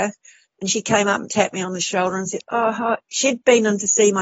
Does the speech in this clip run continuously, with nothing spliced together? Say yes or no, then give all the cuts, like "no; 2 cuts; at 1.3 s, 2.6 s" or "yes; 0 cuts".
yes; 0 cuts